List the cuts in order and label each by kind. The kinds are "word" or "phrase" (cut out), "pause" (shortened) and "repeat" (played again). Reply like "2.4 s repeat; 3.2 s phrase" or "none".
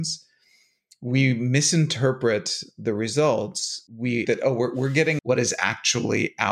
4.2 s word; 5.2 s phrase

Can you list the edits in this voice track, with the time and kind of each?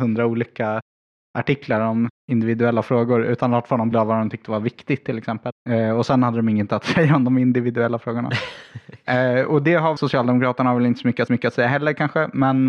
2.2 s pause; 3.9 s word; 5.6 s pause; 10.0 s word; 11.3 s repeat

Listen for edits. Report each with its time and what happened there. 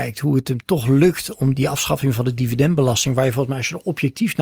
1.5 s word

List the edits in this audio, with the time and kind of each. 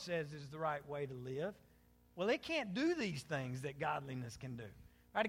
none

